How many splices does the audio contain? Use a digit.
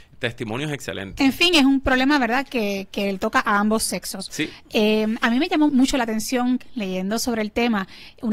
1